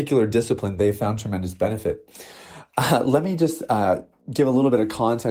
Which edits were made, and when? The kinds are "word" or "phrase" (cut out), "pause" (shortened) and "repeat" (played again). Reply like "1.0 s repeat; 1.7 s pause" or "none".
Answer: none